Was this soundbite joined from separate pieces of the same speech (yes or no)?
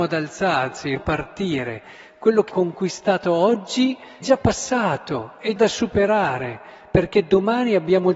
yes